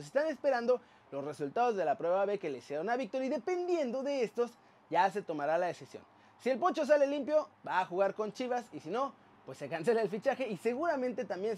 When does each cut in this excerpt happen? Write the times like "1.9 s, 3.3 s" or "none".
none